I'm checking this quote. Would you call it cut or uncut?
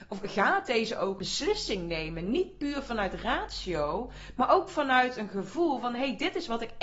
cut